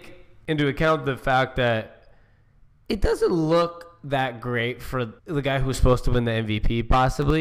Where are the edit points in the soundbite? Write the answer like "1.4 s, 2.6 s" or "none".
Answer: 5.2 s